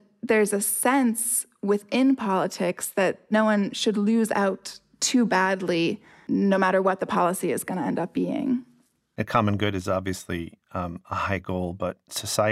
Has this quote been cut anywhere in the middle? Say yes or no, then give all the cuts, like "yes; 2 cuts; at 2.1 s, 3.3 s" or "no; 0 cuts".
no; 0 cuts